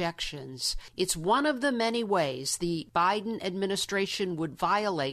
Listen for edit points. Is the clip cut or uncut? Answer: uncut